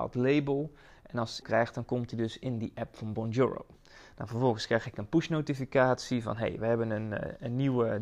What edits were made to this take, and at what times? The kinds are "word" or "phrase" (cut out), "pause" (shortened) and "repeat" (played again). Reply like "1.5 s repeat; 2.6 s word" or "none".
1.4 s phrase